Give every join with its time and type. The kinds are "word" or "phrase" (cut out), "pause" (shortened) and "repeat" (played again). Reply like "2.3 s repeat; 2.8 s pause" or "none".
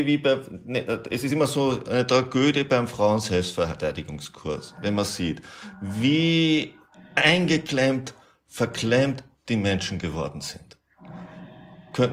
none